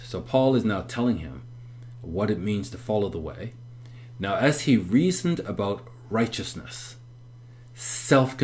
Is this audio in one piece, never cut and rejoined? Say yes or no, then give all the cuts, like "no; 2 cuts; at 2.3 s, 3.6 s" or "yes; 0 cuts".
yes; 0 cuts